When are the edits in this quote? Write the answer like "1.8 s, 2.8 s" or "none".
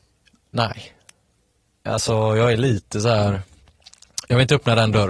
none

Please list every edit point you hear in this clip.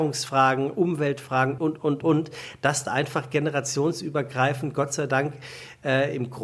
1.6 s, 2.0 s, 2.8 s

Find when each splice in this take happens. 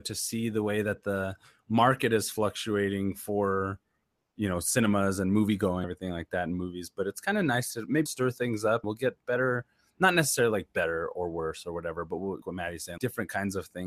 5.8 s, 8.1 s, 8.8 s, 12.4 s, 13.0 s

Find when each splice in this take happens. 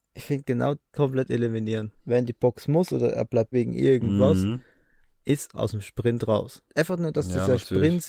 0.9 s, 2.0 s, 3.5 s, 5.5 s, 6.7 s

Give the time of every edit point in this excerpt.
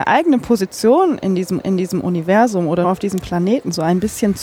1.6 s, 2.8 s

